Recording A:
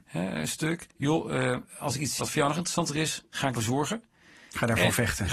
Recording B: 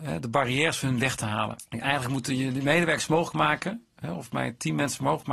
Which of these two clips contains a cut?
A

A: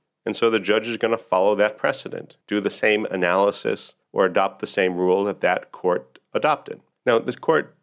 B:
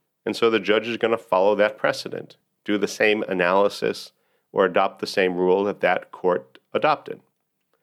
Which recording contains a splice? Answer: A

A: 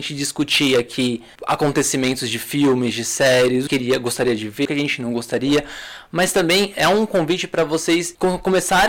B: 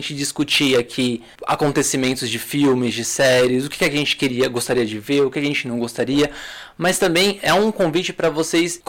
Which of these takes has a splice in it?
A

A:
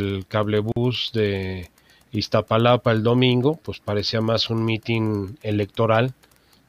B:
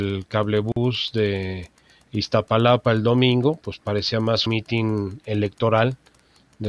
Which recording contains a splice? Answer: B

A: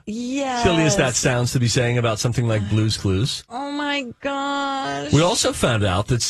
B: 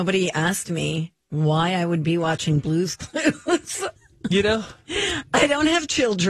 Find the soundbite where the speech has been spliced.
B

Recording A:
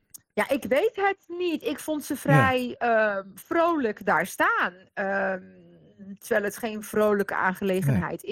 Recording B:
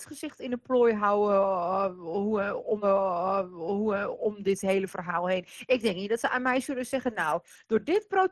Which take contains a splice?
B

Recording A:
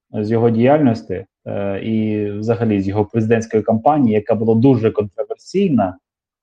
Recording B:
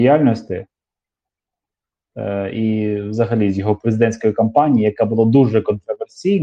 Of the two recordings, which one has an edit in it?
A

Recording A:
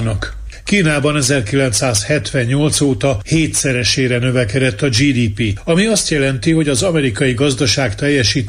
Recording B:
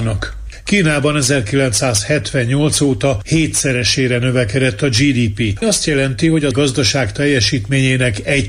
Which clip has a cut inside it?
B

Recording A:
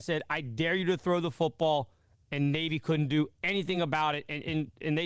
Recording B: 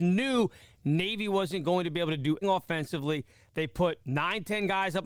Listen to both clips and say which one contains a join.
B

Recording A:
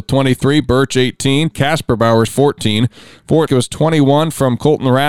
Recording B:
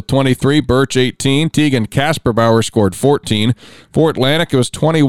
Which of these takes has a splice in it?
A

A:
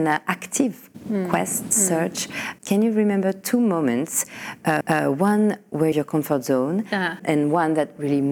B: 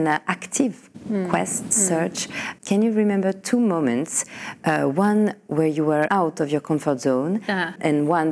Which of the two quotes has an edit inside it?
A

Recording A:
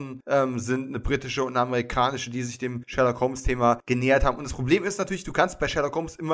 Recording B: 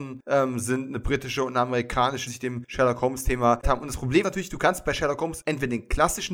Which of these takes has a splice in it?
B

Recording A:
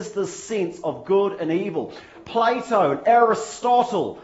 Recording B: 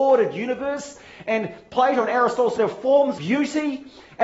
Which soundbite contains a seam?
B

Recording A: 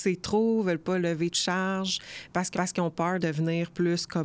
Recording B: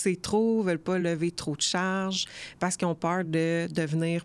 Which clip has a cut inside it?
A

